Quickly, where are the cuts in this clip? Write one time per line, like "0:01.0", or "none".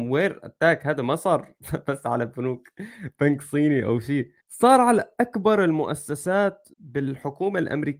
0:04.4
0:06.7

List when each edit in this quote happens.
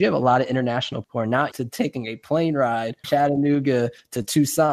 0:01.0
0:01.5
0:03.0

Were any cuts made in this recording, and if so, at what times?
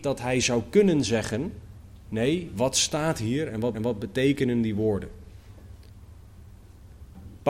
0:03.7

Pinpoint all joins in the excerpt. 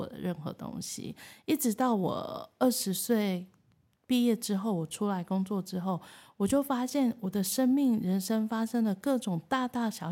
none

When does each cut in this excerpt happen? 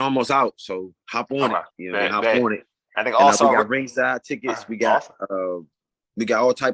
0:01.7

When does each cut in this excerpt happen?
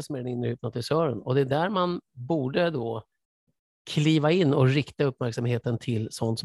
none

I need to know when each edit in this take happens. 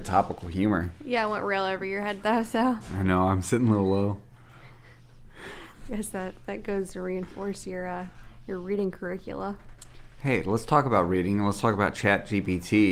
none

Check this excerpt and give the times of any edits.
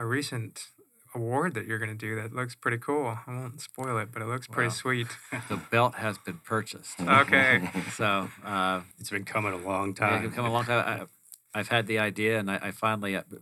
0:08.9
0:11.4

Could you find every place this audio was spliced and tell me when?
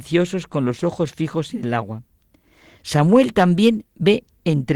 none

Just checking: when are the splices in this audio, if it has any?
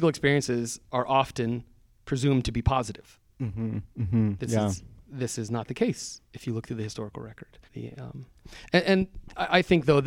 0:07.7

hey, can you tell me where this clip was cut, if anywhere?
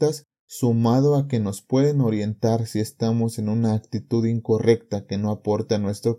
none

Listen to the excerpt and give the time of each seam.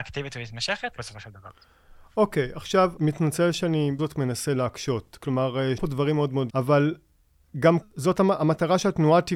0:01.0
0:03.0
0:04.0
0:05.8
0:06.5
0:07.8

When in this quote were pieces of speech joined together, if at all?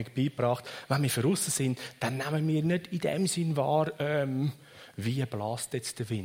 none

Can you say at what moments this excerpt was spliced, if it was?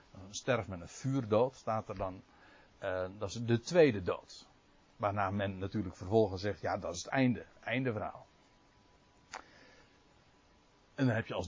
none

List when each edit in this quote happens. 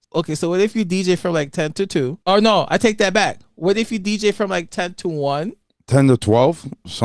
0:02.2

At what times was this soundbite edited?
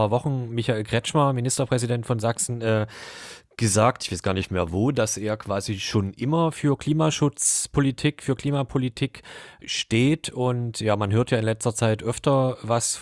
0:09.6

